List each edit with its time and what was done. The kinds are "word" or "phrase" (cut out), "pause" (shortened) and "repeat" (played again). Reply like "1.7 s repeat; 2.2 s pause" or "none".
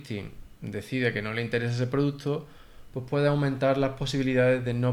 none